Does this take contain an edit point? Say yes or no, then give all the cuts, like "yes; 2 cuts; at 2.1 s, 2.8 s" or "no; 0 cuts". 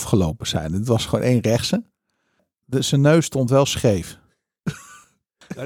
no; 0 cuts